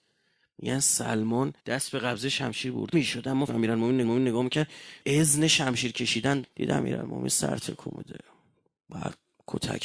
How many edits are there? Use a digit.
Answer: 6